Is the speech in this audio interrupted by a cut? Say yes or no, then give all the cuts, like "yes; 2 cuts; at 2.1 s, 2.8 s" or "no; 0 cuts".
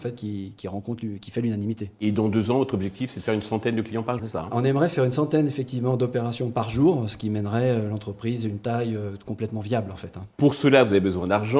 yes; 2 cuts; at 4.2 s, 10.3 s